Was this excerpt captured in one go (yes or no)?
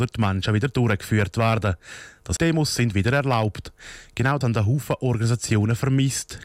no